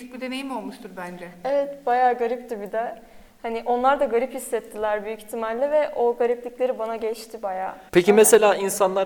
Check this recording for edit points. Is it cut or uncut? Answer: cut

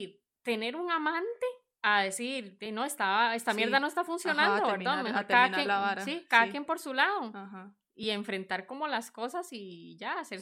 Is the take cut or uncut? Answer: uncut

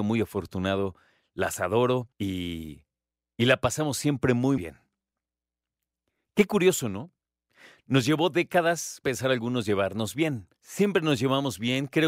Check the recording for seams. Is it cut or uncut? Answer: cut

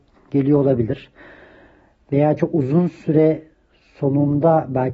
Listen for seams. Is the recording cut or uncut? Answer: uncut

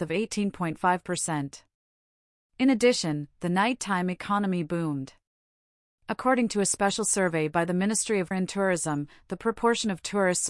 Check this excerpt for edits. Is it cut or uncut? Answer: cut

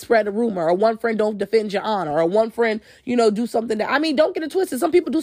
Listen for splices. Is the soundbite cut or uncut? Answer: uncut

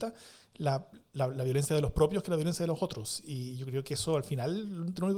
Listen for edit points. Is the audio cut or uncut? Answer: uncut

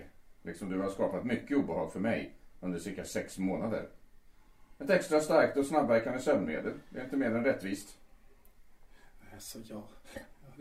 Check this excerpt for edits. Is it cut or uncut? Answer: uncut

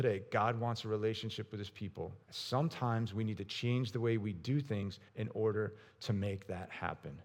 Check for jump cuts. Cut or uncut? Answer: cut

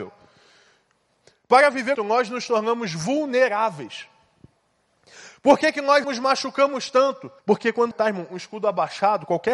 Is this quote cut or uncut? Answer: cut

